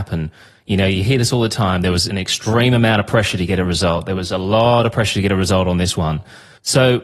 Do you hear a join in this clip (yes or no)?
yes